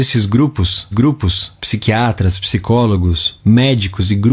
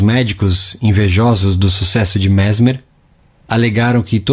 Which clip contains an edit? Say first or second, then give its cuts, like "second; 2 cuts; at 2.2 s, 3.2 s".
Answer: first; 2 cuts; at 0.9 s, 3.4 s